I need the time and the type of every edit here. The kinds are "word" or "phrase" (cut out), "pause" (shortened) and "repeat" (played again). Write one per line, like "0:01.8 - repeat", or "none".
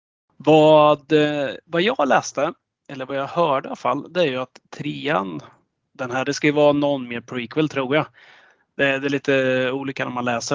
none

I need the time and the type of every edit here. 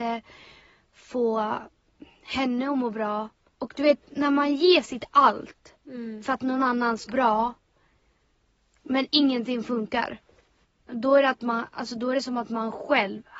0:03.5 - pause
0:07.1 - word
0:10.6 - pause

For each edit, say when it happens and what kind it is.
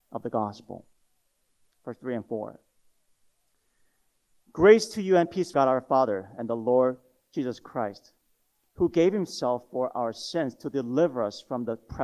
0:05.5 - word

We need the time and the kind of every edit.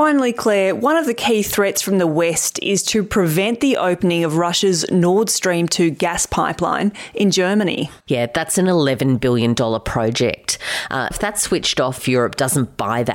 0:08.0 - pause
0:11.1 - word
0:12.0 - word

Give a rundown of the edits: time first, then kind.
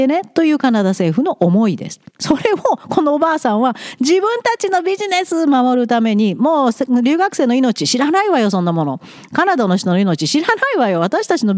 0:02.1 - pause

